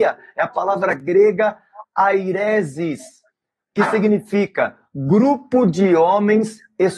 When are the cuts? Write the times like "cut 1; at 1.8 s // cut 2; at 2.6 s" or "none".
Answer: none